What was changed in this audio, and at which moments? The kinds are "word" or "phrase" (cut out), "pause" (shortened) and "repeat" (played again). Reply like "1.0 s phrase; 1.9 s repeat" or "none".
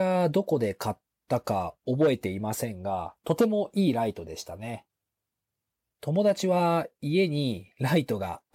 3.2 s pause; 5.7 s pause